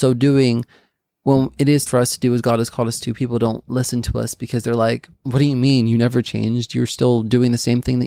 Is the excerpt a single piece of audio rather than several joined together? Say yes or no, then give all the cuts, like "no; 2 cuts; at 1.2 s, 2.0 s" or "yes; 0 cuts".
no; 2 cuts; at 1.9 s, 5.2 s